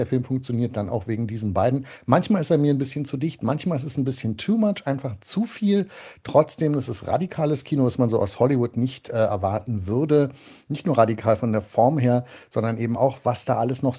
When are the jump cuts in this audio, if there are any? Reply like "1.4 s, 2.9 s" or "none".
none